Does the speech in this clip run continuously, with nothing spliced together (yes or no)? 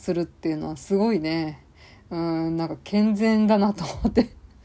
yes